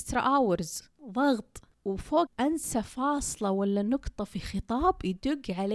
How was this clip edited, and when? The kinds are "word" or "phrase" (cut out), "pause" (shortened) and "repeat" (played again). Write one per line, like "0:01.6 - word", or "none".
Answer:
0:02.3 - word